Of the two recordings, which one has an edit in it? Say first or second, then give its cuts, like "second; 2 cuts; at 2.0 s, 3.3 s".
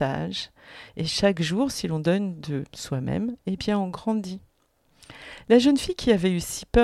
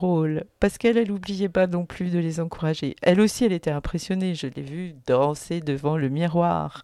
first; 1 cut; at 2.7 s